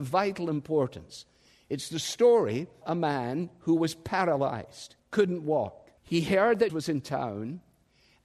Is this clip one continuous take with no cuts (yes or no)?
no